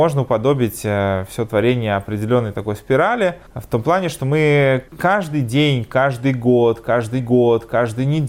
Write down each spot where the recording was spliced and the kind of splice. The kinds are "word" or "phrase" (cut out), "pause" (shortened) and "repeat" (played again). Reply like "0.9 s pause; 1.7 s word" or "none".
3.5 s pause; 4.9 s pause; 7.2 s repeat